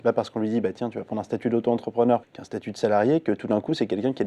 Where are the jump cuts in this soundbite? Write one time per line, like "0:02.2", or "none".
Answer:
0:02.2

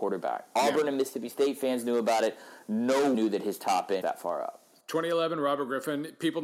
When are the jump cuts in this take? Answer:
0:03.1
0:04.0

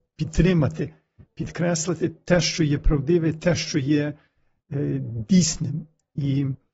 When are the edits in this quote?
none

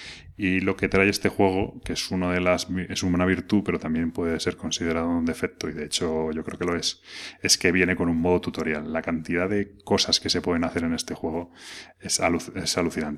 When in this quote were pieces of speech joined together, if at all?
none

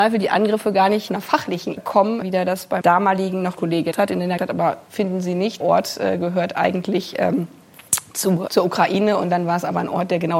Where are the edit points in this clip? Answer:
0:01.1
0:01.8
0:02.2
0:02.8
0:03.6
0:03.9
0:04.4
0:05.6
0:08.5

